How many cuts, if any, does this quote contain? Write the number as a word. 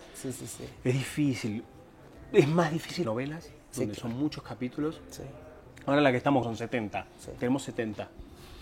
two